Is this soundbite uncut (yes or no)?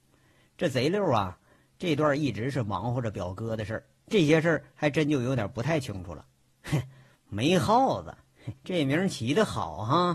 no